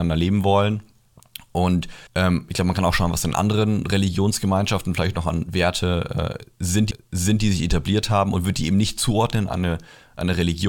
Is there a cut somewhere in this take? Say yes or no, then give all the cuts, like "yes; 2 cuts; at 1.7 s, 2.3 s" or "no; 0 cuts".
yes; 2 cuts; at 2.1 s, 6.9 s